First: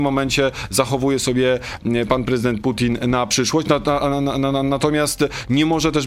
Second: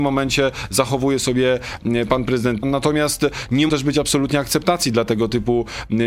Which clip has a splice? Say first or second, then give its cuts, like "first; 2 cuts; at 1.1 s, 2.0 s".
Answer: second; 2 cuts; at 2.6 s, 3.7 s